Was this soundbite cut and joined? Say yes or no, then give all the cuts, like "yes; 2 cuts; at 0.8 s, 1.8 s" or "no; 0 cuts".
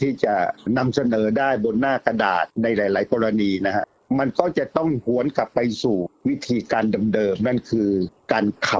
yes; 1 cut; at 2.5 s